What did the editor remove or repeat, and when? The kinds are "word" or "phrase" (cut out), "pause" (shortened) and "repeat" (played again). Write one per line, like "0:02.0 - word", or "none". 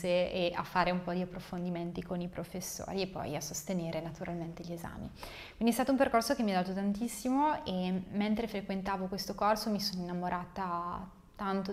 none

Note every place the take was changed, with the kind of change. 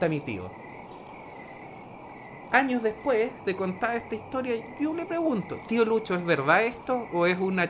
none

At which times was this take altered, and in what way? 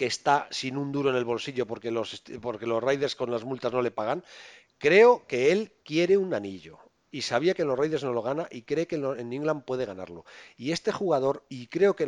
none

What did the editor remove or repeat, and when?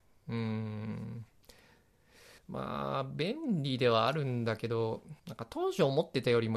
0:02.4 - pause
0:05.2 - pause

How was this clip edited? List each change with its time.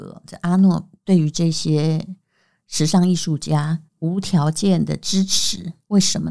0:03.9 - pause

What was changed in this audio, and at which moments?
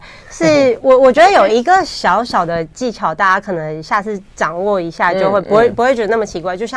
none

